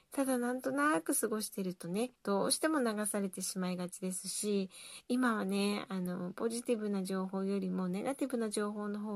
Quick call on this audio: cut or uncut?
cut